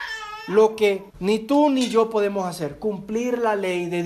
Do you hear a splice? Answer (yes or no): yes